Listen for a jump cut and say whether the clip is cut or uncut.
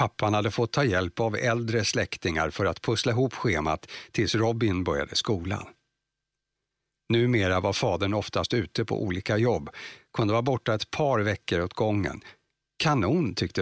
uncut